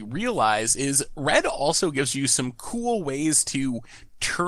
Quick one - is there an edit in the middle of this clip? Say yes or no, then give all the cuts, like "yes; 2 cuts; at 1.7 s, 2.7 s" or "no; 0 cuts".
no; 0 cuts